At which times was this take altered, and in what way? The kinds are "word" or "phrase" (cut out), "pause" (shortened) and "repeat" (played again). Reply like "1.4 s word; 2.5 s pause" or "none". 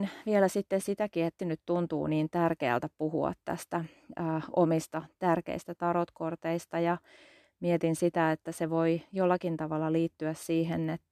1.4 s word